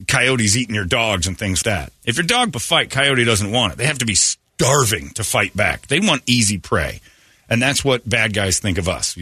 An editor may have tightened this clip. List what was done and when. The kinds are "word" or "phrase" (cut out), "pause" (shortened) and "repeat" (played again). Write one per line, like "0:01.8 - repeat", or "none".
0:01.6 - word
0:02.0 - pause
0:02.5 - phrase